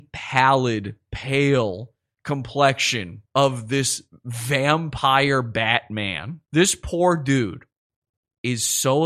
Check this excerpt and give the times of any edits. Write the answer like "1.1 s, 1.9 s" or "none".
3.3 s, 6.5 s